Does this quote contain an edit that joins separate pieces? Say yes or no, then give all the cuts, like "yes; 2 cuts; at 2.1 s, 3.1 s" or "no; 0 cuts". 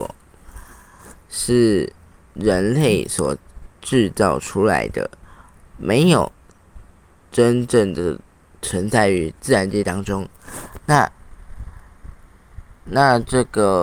no; 0 cuts